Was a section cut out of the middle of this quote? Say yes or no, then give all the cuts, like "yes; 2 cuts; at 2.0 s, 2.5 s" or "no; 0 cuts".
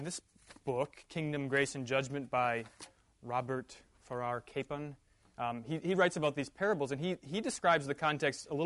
no; 0 cuts